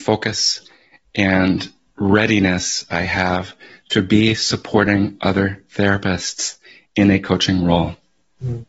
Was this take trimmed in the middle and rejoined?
no; 0 cuts

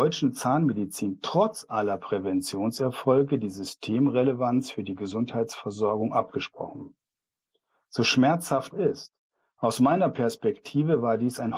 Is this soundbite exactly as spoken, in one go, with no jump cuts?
no; 1 cut; at 8.7 s

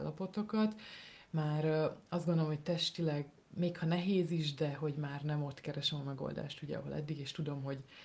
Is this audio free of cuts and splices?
yes; 0 cuts

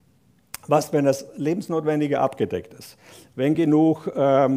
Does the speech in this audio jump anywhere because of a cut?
no; 0 cuts

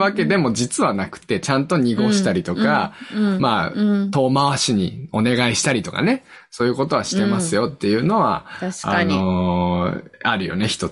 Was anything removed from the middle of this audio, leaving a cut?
no; 0 cuts

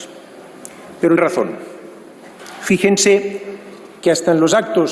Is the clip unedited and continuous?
no; 1 cut; at 1.2 s

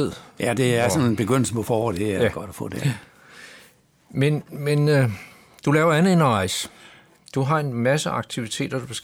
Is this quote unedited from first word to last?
yes; 0 cuts

